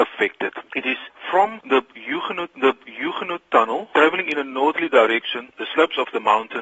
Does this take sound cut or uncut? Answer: cut